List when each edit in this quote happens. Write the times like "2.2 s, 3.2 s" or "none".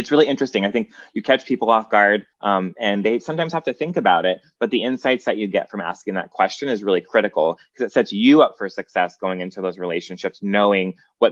2.3 s